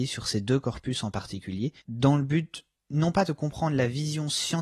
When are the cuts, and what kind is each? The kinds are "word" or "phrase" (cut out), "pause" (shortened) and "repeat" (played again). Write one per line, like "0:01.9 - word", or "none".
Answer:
0:01.8 - pause